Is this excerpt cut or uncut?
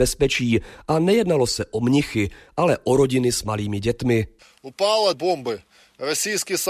cut